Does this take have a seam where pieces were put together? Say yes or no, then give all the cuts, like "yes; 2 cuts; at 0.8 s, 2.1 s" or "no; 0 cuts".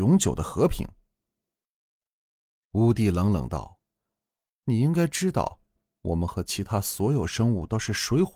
no; 0 cuts